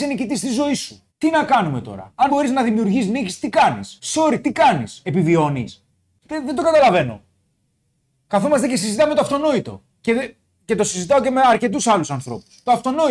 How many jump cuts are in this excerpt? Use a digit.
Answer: 3